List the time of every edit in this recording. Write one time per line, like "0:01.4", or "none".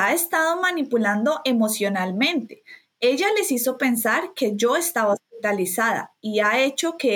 none